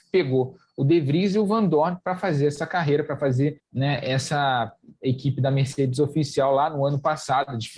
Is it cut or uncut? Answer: uncut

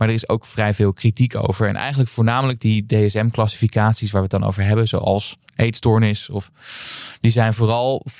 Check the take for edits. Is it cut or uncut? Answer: uncut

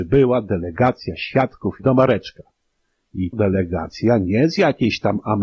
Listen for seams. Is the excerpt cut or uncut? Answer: cut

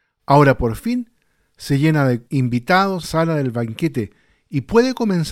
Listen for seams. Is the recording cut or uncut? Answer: cut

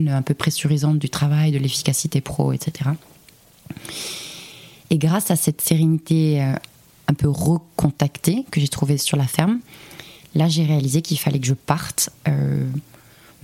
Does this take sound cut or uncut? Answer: uncut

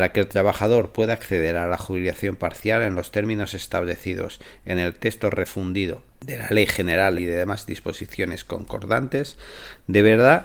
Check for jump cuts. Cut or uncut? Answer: cut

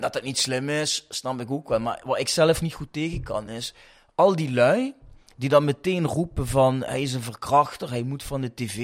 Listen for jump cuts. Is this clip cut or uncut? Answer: uncut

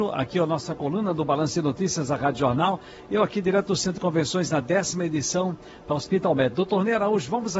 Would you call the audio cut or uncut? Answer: uncut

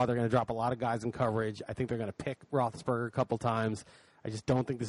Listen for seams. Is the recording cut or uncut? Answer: uncut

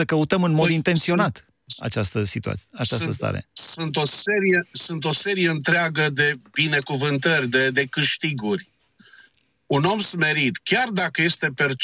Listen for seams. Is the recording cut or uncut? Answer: uncut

